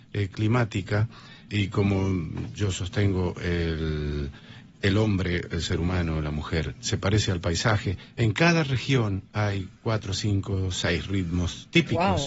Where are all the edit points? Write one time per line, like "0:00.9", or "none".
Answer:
0:01.5